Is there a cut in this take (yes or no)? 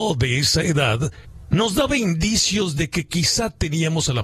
no